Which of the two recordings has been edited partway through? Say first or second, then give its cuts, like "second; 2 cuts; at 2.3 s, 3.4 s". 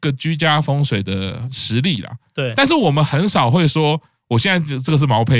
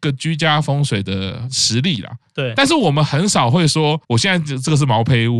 second; 1 cut; at 4.0 s